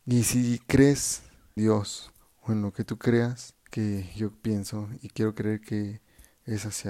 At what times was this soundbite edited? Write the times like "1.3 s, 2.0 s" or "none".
1.6 s, 3.6 s

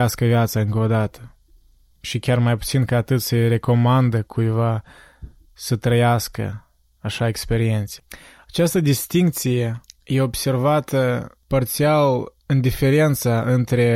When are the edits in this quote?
none

